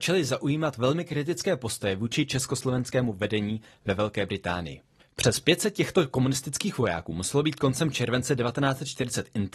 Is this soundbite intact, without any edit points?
yes; 0 cuts

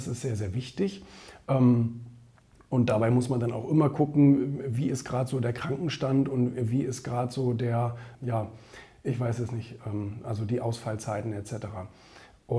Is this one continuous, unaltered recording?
no; 1 cut; at 8.1 s

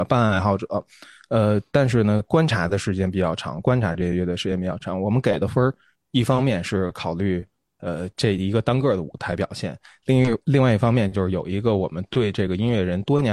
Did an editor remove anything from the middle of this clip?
no; 0 cuts

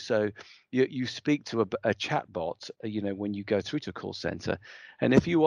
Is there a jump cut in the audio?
no; 0 cuts

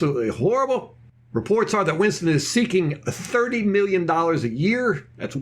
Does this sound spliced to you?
no; 0 cuts

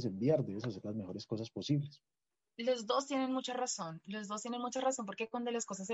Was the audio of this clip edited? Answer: no; 0 cuts

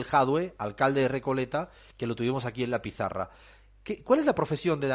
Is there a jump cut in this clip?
no; 0 cuts

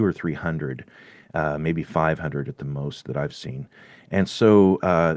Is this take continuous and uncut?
yes; 0 cuts

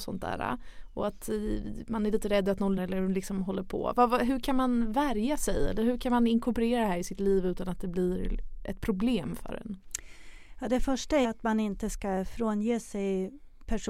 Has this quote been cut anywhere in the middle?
yes; 2 cuts; at 2.8 s, 11.2 s

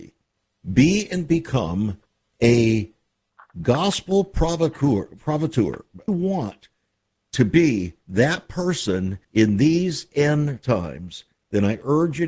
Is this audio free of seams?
no; 3 cuts; at 2.1 s, 6.1 s, 9.2 s

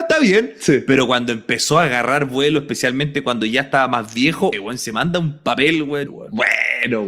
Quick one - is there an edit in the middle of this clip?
yes; 2 cuts; at 4.5 s, 6.1 s

